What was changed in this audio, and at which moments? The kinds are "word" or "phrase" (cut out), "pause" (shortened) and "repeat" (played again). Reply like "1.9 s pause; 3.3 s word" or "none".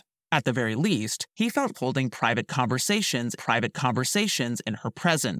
1.7 s word; 3.4 s repeat